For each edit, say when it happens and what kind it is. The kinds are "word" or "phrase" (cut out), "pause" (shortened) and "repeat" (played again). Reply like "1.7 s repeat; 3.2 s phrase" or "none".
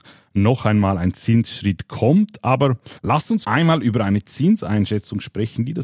3.0 s pause; 3.4 s word

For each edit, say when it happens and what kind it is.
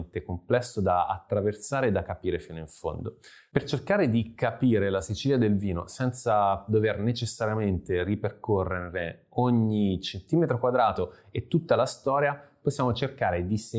none

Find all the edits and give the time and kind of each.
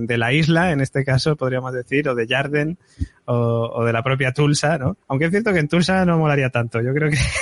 5.0 s pause

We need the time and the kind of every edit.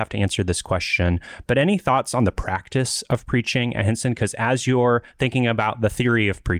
none

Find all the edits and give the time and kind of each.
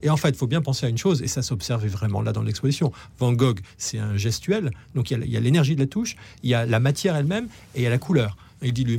none

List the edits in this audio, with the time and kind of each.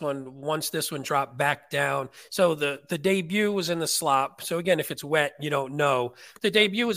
none

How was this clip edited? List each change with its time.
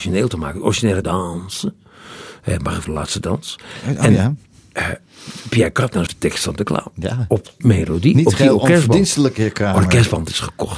1.0 s word; 2.8 s word; 6.1 s word; 7.6 s word

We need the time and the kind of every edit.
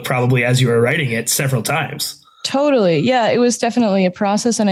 none

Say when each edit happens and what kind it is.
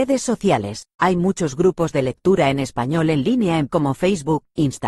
3.7 s word

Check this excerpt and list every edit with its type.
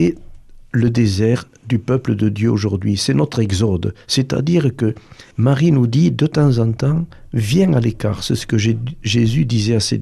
5.3 s pause

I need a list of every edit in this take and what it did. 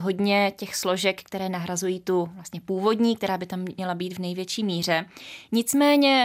none

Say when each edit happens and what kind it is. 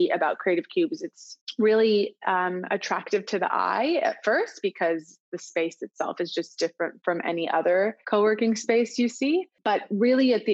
8.0 s pause

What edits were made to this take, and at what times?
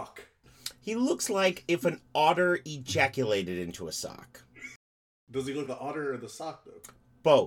5.7 s word

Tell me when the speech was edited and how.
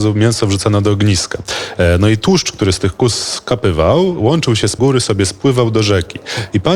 4.8 s phrase

